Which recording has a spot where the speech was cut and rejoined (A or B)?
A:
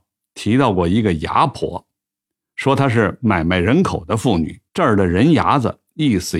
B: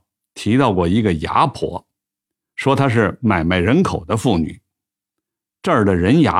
A